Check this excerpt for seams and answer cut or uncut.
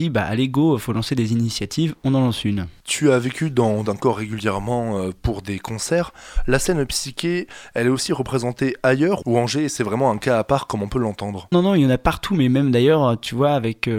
cut